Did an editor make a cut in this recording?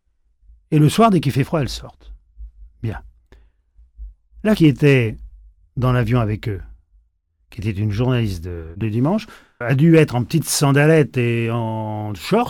yes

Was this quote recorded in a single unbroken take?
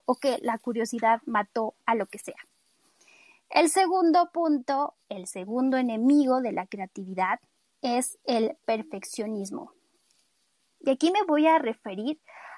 yes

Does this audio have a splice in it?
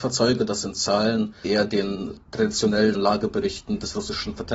yes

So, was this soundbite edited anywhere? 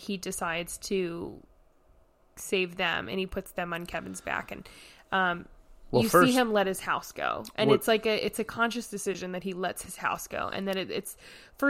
no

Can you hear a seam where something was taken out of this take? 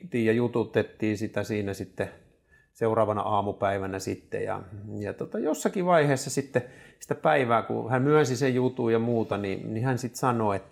no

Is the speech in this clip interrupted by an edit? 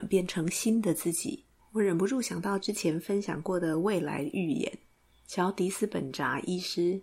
yes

